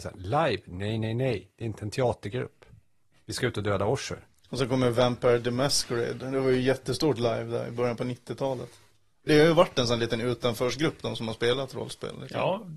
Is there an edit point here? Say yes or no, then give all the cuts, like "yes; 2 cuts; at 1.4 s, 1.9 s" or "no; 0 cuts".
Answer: yes; 2 cuts; at 4.3 s, 9.3 s